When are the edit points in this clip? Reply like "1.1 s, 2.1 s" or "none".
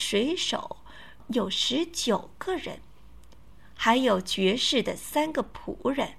1.2 s